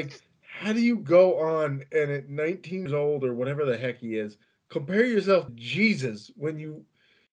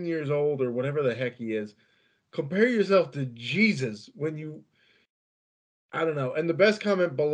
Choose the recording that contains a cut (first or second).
first